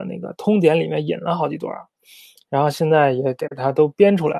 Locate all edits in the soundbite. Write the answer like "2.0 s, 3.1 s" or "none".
none